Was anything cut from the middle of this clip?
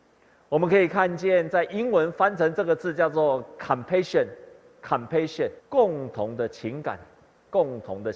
yes; 1 cut; at 5.6 s

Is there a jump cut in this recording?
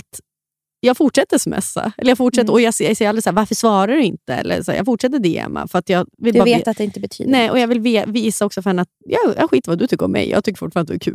yes; 1 cut; at 8.9 s

